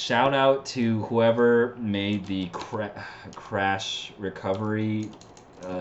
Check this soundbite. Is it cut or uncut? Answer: uncut